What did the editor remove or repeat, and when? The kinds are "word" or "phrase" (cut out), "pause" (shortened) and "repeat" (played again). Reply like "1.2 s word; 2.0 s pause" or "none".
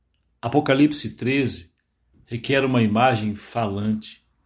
none